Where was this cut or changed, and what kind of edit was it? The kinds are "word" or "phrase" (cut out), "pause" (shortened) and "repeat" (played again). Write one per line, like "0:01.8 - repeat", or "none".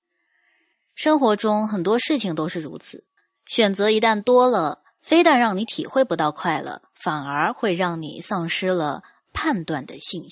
0:03.2 - pause